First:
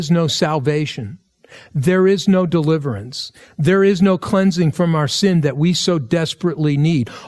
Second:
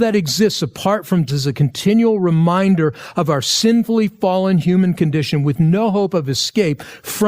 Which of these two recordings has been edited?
second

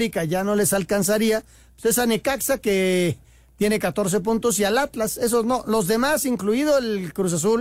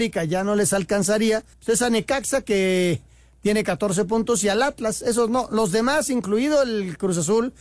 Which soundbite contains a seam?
second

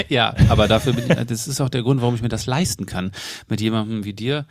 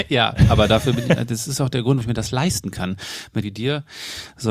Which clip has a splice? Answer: second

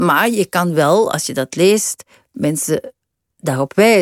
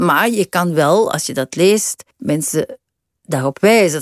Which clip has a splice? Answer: second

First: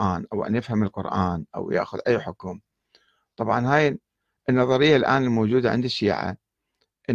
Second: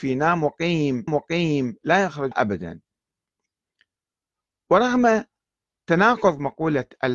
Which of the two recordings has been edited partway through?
second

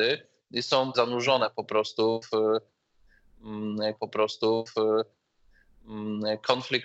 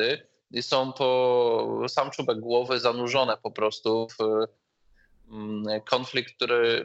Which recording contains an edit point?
first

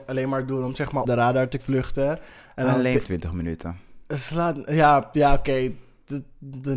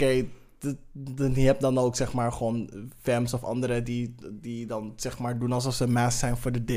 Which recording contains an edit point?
first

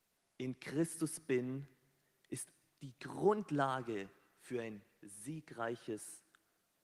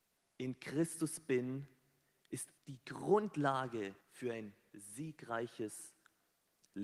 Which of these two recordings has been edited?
second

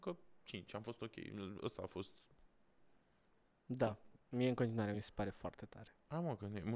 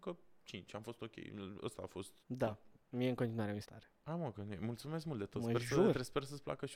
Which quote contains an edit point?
second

